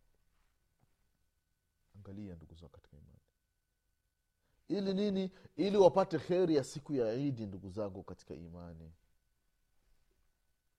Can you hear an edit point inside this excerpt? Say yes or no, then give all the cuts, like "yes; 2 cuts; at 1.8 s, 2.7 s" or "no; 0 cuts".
no; 0 cuts